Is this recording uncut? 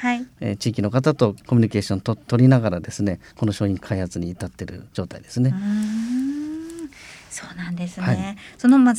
no; 2 cuts; at 1.4 s, 4.9 s

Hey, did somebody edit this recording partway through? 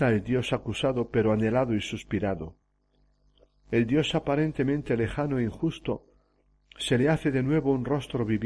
no; 0 cuts

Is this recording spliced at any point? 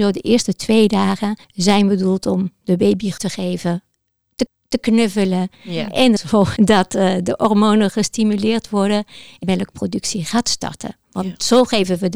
yes; 6 cuts; at 1.4 s, 3.2 s, 4.5 s, 6.2 s, 6.6 s, 9.4 s

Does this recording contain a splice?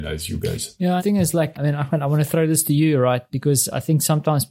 yes; 2 cuts; at 1.0 s, 1.5 s

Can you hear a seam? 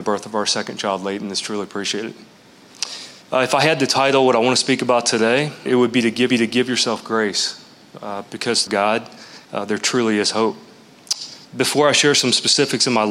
yes; 6 cuts; at 3.2 s, 5.7 s, 6.3 s, 8.7 s, 9.4 s, 11.4 s

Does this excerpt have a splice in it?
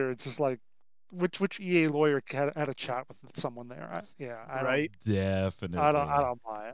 yes; 1 cut; at 4.1 s

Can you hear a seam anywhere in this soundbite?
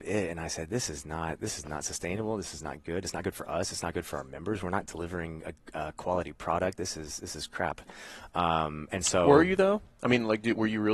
no; 0 cuts

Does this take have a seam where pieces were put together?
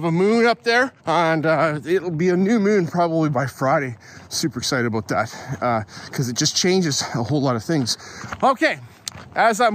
yes; 1 cut; at 1.0 s

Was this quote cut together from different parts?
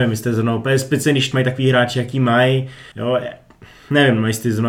yes; 2 cuts; at 1.3 s, 2.9 s

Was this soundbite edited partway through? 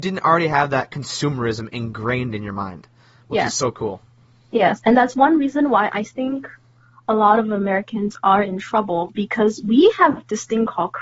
no; 0 cuts

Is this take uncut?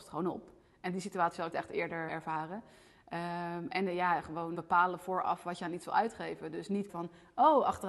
no; 4 cuts; at 1.5 s, 2.1 s, 4.5 s, 6.9 s

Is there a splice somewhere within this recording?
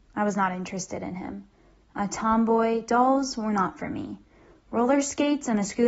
no; 0 cuts

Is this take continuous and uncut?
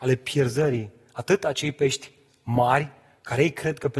yes; 0 cuts

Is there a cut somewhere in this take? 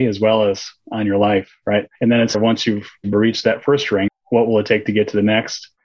yes; 4 cuts; at 2.0 s, 2.3 s, 3.1 s, 4.1 s

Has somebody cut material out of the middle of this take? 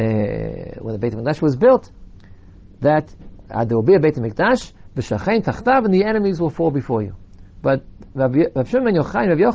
yes; 1 cut; at 7.5 s

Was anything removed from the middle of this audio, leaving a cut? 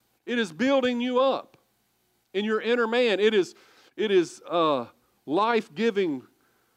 no; 0 cuts

